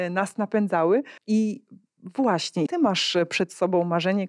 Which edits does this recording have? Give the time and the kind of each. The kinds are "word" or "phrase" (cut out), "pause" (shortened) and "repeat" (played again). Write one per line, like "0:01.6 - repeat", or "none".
0:01.2 - pause
0:02.7 - word